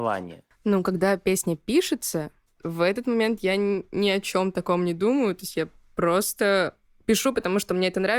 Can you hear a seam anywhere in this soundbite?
no; 0 cuts

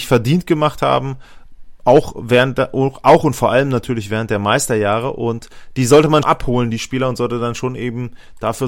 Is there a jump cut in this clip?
yes; 1 cut; at 6.2 s

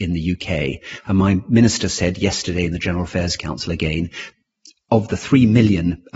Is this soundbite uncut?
yes; 0 cuts

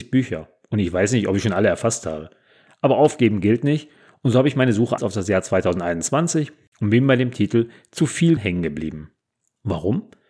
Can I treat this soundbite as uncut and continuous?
no; 2 cuts; at 5.0 s, 8.4 s

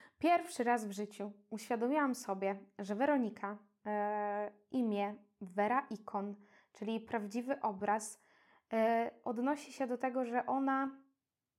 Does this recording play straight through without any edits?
yes; 0 cuts

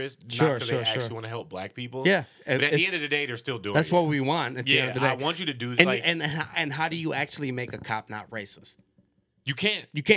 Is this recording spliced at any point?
no; 0 cuts

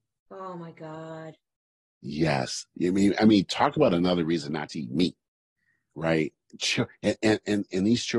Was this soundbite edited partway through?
no; 0 cuts

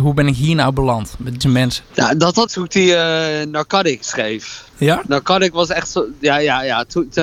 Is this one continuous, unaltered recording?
no; 3 cuts; at 1.4 s, 2.5 s, 4.7 s

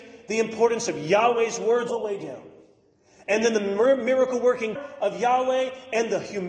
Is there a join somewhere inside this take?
yes; 2 cuts; at 1.9 s, 4.8 s

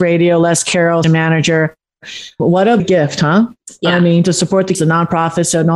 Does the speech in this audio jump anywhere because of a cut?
yes; 5 cuts; at 1.0 s, 2.4 s, 2.8 s, 4.2 s, 4.7 s

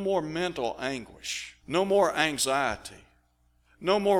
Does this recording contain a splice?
yes; 1 cut; at 1.6 s

